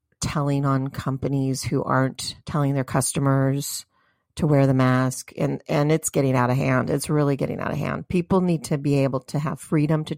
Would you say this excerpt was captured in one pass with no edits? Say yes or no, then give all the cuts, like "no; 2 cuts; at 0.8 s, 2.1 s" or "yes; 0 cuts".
no; 1 cut; at 2.4 s